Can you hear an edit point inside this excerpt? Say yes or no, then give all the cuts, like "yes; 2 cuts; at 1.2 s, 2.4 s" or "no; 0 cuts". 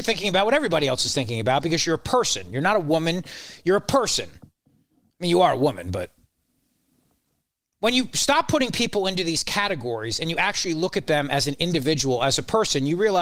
no; 0 cuts